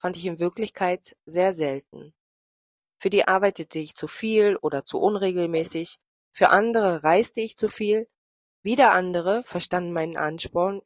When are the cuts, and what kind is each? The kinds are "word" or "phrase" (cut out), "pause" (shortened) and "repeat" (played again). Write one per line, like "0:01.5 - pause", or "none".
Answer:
0:03.2 - word

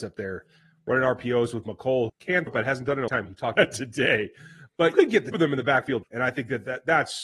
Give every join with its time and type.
0:02.1 - word
0:02.5 - word
0:03.1 - word
0:03.5 - word
0:04.9 - word
0:05.3 - word
0:06.0 - word

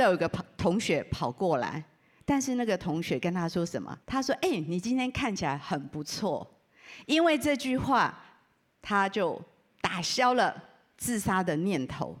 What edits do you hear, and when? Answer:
0:04.0 - pause

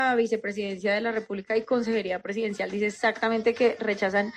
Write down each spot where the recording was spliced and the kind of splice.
none

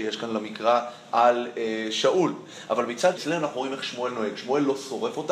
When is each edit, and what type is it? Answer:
0:03.2 - word

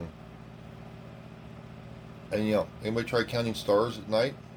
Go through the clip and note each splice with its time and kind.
none

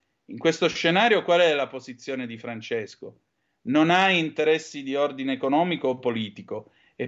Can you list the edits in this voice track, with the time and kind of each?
none

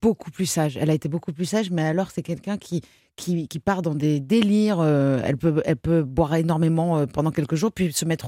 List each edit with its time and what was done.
0:03.5 - word

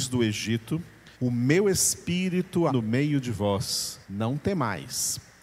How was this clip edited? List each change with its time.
0:01.1 - pause
0:02.7 - word
0:04.0 - pause

